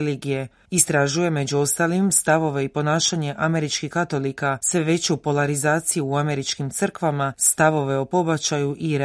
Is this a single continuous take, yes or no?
yes